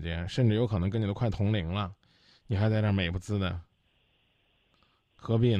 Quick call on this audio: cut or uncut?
uncut